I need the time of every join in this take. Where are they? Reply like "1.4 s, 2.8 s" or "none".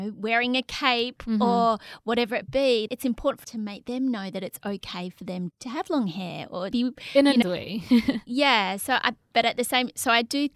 2.4 s, 2.9 s, 3.4 s, 5.5 s, 6.7 s, 7.4 s